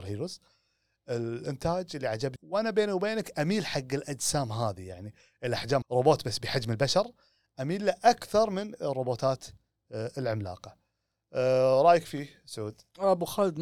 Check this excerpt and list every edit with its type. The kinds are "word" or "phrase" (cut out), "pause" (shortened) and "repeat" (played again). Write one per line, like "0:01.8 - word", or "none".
0:02.4 - word
0:05.8 - phrase